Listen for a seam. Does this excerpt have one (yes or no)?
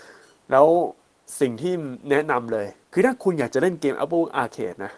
yes